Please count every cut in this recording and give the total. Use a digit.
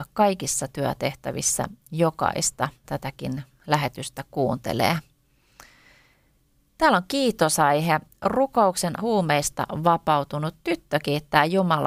2